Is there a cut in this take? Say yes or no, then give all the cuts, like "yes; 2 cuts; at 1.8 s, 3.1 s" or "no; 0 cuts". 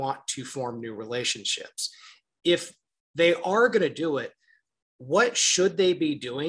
no; 0 cuts